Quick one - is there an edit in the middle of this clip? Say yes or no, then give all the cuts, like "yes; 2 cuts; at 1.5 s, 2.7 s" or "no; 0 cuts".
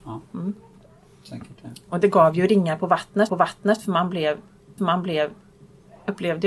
yes; 2 cuts; at 3.3 s, 4.8 s